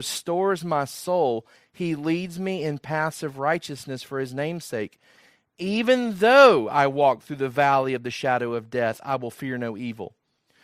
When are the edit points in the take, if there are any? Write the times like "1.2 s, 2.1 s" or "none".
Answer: none